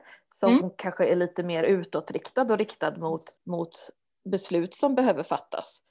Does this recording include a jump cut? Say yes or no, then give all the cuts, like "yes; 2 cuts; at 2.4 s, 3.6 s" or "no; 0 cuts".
yes; 1 cut; at 3.4 s